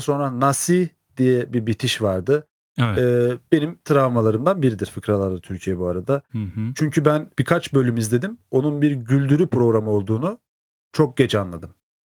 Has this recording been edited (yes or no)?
yes